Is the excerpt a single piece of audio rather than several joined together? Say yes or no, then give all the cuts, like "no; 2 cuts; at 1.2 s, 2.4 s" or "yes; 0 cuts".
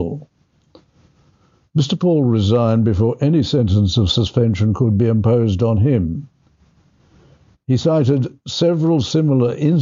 yes; 0 cuts